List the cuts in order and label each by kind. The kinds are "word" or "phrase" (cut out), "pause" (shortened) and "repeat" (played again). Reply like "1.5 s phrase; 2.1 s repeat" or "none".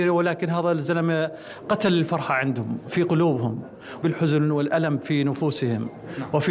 4.0 s word